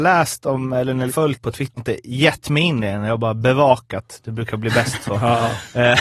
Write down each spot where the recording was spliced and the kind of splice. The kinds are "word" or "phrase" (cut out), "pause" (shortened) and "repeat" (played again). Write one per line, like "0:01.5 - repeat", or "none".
0:01.1 - word
0:01.4 - word
0:01.8 - word